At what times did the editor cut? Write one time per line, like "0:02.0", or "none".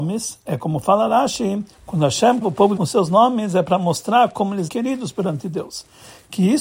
0:01.7
0:02.4
0:02.8
0:04.7